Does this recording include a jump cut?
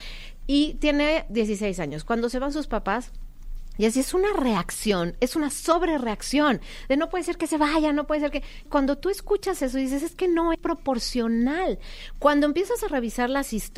yes; 2 cuts; at 8.7 s, 10.5 s

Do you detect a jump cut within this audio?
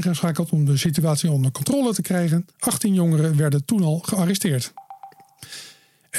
yes; 1 cut; at 2.5 s

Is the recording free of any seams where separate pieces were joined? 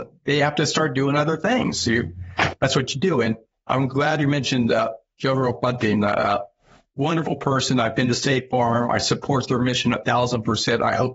yes; 0 cuts

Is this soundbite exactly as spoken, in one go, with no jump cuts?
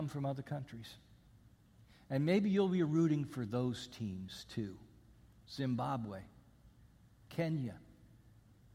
yes; 0 cuts

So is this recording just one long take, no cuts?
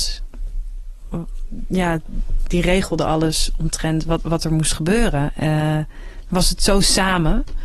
yes; 0 cuts

